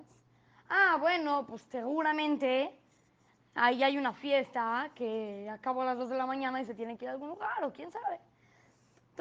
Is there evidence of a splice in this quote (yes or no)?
no